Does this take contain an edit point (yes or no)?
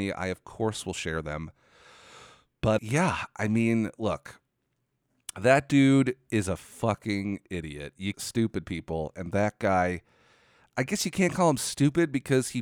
yes